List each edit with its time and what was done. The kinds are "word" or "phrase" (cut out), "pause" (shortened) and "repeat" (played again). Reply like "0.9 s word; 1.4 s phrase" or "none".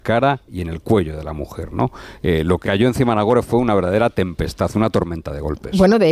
2.6 s word